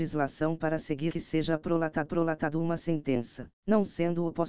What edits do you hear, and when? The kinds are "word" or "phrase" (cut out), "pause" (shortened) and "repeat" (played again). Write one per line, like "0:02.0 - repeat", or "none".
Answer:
0:01.1 - phrase
0:02.1 - repeat
0:03.6 - pause